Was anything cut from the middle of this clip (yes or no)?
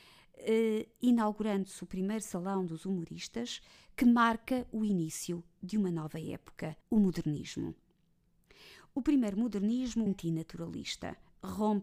yes